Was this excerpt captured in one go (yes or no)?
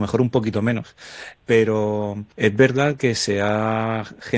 yes